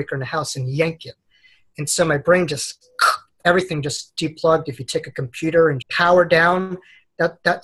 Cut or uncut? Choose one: cut